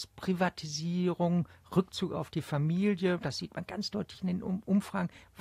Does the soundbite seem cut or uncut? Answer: uncut